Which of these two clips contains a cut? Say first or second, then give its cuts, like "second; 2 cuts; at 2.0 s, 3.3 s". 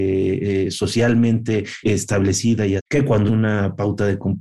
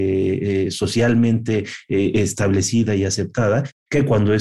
first; 3 cuts; at 1.8 s, 2.8 s, 3.3 s